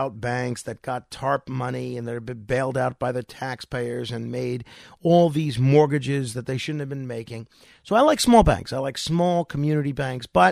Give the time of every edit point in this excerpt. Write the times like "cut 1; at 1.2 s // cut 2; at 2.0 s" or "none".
none